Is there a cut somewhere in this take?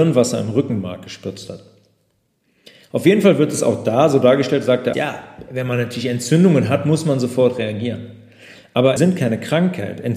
yes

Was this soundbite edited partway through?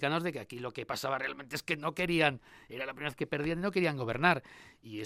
no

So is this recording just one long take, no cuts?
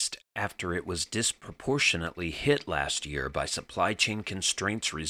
yes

